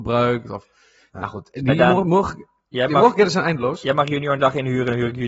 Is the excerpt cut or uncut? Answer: uncut